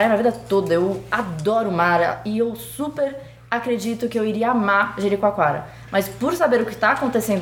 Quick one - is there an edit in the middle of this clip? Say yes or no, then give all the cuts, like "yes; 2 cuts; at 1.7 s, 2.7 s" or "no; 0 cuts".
no; 0 cuts